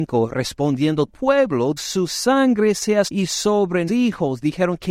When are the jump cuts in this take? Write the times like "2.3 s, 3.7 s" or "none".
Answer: 1.1 s, 1.8 s, 3.1 s, 3.9 s